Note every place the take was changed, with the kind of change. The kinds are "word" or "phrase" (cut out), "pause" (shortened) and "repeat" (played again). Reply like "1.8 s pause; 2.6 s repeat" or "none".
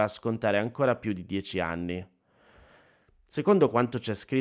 none

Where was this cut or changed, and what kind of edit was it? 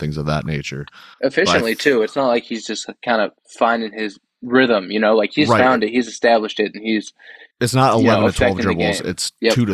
1.1 s pause; 3.4 s pause; 7.5 s pause

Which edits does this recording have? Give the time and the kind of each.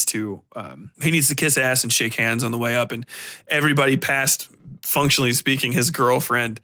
0.9 s pause

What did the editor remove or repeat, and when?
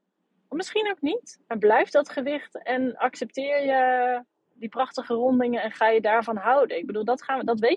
none

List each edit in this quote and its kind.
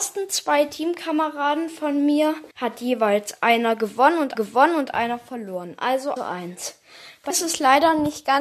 2.5 s pause; 4.3 s repeat; 6.2 s phrase; 7.3 s word

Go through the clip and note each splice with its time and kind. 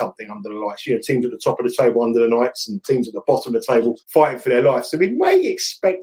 4.0 s pause

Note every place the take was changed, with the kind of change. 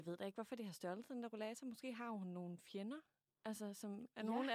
none

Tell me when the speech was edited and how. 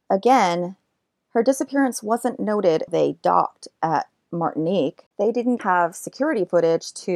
2.9 s word; 5.1 s pause; 5.6 s word

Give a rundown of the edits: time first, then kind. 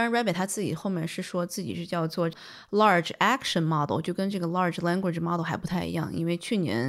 none

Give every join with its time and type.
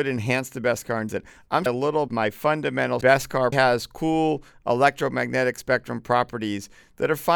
1.1 s word; 1.7 s phrase; 2.1 s phrase; 3.0 s phrase; 3.5 s word

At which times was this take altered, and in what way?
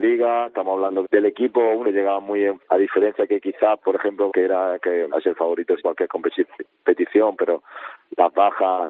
1.0 s word; 1.8 s word; 2.6 s word; 3.8 s word; 4.3 s word; 5.1 s word; 5.8 s word

